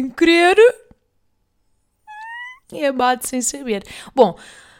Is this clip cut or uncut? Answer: cut